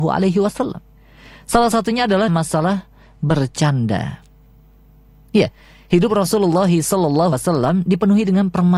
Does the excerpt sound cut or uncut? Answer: cut